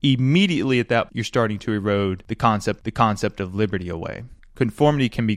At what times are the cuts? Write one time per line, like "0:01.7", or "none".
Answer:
0:01.1
0:02.8